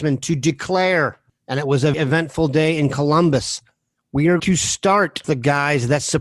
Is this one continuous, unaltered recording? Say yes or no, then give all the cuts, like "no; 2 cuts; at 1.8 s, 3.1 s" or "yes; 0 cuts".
no; 3 cuts; at 1.9 s, 4.4 s, 5.2 s